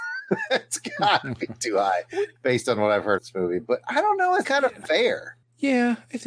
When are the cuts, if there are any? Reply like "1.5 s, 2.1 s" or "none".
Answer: 3.2 s, 4.4 s